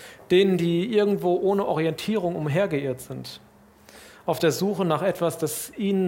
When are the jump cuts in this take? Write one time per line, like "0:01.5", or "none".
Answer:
none